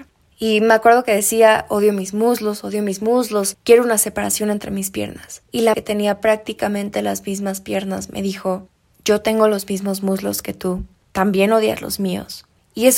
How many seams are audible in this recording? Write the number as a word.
one